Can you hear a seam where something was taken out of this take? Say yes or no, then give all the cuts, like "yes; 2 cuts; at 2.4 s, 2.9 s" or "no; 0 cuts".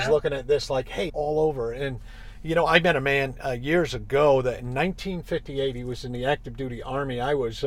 yes; 1 cut; at 1.1 s